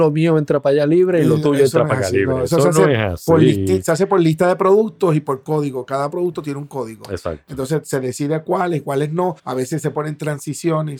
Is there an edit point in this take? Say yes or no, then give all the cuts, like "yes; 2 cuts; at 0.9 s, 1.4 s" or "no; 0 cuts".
yes; 1 cut; at 9.4 s